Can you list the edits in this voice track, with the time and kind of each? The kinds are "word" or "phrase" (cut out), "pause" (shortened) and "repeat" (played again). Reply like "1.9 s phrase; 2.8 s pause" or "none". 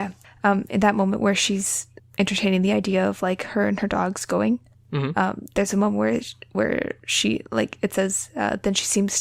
none